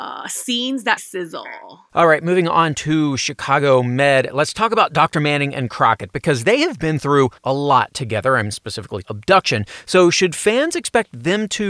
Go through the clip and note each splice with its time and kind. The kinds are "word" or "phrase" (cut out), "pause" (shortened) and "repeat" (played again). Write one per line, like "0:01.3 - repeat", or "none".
0:01.0 - word
0:07.4 - pause
0:09.0 - phrase